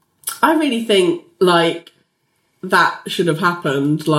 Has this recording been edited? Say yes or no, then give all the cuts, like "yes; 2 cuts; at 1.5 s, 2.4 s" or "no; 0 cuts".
no; 0 cuts